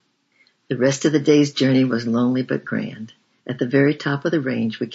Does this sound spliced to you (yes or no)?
no